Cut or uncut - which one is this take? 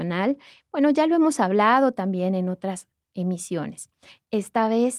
uncut